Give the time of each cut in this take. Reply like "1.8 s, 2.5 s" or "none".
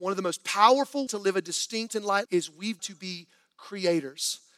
1.1 s, 1.9 s, 2.3 s, 2.8 s